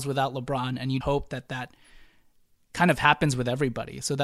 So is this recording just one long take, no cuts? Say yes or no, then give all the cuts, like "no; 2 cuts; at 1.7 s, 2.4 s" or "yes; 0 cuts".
no; 1 cut; at 1.0 s